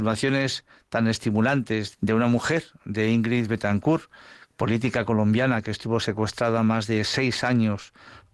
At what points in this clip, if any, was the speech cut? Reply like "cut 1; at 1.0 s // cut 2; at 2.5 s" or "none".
cut 1; at 1.9 s